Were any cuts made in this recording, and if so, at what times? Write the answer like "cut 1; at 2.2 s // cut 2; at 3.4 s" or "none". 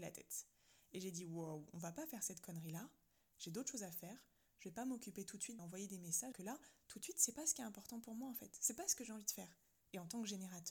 cut 1; at 5.6 s // cut 2; at 6.3 s // cut 3; at 7.3 s